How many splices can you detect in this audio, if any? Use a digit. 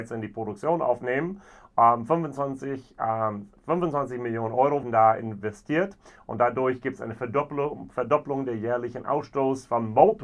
1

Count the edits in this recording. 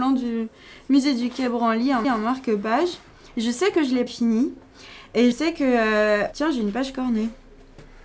4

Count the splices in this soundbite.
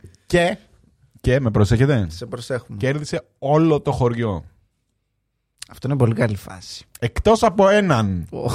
0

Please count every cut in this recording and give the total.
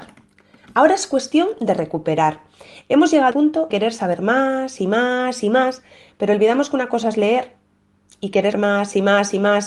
3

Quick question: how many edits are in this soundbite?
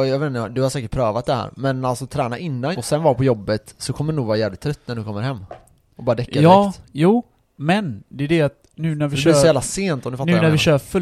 1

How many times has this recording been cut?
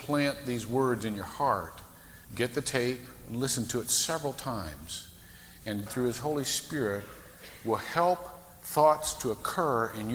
2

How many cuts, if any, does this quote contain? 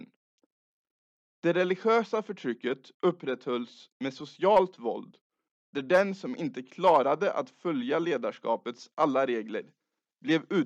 0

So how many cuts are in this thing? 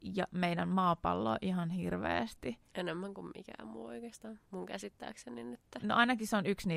1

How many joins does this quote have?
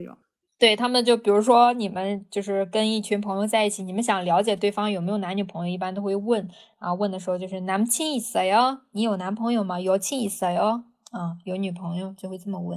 0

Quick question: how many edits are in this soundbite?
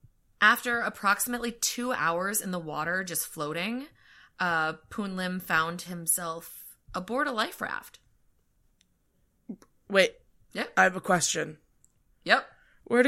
1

